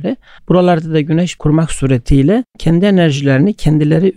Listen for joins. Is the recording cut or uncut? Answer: cut